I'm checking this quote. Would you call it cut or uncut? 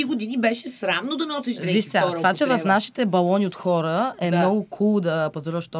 uncut